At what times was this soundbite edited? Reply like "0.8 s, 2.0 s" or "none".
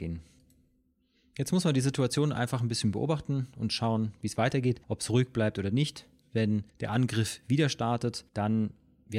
4.8 s, 6.7 s, 8.3 s

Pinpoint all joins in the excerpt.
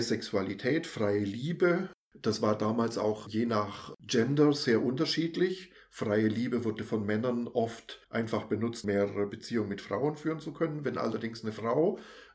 8.0 s, 8.8 s

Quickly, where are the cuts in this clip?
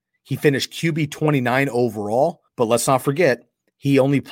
2.5 s

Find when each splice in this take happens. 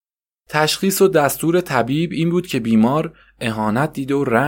none

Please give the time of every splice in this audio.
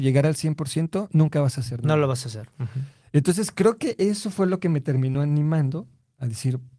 none

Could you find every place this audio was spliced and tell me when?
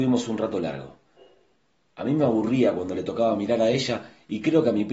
none

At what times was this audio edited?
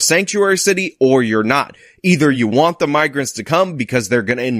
none

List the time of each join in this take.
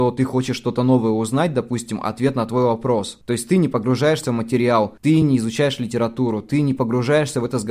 none

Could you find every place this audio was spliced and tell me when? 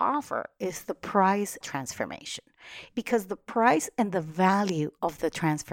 1.6 s

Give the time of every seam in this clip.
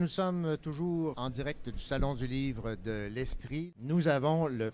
1.1 s

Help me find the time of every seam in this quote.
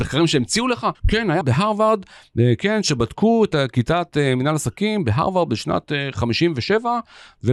1.0 s, 1.4 s

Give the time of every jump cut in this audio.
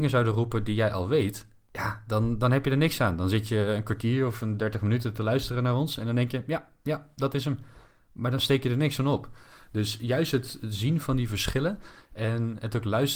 none

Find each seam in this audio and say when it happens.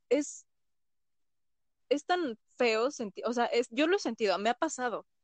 none

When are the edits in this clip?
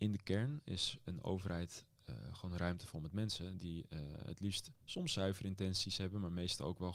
none

